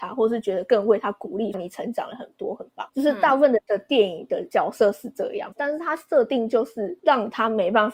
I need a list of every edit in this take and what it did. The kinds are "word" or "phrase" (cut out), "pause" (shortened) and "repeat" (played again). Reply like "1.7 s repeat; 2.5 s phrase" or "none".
1.5 s phrase; 2.9 s pause; 5.5 s word